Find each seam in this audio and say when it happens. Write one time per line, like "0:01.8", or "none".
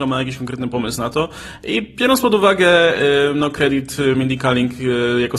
none